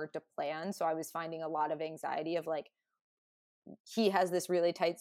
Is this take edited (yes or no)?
yes